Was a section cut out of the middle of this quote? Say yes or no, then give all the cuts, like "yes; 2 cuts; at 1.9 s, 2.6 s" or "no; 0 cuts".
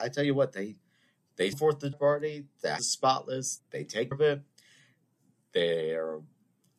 yes; 5 cuts; at 1.5 s, 1.9 s, 2.8 s, 3.6 s, 4.1 s